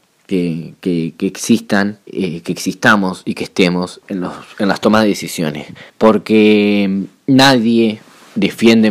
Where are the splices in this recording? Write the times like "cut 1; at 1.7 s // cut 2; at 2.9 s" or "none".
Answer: cut 1; at 2.0 s // cut 2; at 4.0 s // cut 3; at 5.9 s